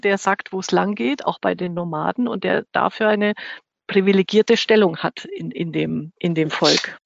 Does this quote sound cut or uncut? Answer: uncut